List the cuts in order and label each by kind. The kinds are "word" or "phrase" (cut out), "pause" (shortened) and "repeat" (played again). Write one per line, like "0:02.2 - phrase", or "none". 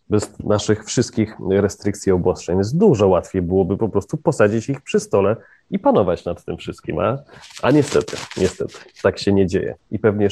none